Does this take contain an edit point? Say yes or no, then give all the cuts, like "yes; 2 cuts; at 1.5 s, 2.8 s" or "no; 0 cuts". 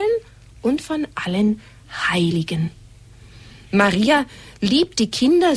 no; 0 cuts